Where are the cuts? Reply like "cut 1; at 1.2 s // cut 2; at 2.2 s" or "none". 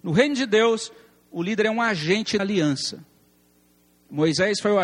cut 1; at 2.4 s